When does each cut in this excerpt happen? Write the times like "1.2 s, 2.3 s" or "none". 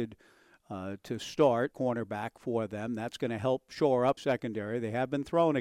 1.7 s, 4.2 s